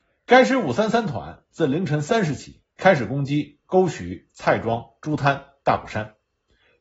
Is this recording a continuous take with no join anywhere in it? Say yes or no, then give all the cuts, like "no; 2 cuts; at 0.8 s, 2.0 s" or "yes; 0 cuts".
no; 1 cut; at 2.7 s